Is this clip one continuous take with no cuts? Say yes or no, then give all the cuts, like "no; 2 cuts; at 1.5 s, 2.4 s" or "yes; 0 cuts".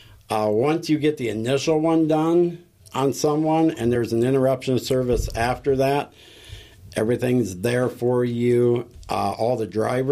yes; 0 cuts